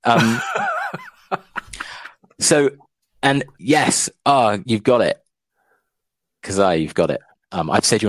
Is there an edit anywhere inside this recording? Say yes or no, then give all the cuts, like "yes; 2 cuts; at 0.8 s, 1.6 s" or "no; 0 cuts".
yes; 1 cut; at 4.6 s